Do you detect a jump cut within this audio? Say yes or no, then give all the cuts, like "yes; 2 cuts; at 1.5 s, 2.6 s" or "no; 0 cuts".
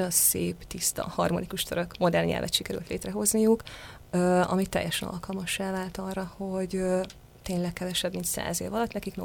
no; 0 cuts